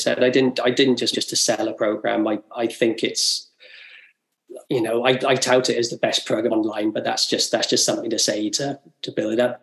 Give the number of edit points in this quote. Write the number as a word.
four